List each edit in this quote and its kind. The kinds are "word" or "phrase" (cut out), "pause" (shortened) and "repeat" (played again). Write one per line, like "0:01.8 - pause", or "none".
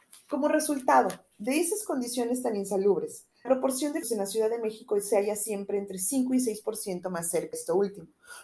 0:03.4 - word
0:04.0 - word
0:07.5 - word

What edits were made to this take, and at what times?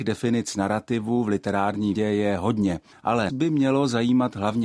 0:02.0 - word
0:03.3 - word

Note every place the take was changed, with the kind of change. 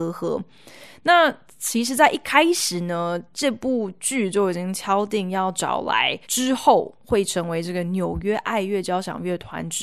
0:06.2 - pause
0:07.0 - pause

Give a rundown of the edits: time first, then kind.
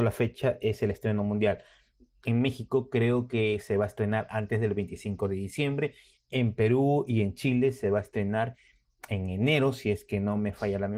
none

